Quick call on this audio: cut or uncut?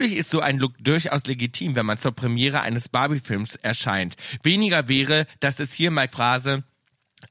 cut